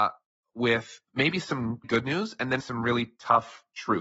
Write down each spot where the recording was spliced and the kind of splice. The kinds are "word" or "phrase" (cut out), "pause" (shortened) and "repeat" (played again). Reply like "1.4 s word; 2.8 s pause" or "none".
1.1 s pause; 1.8 s word; 2.6 s word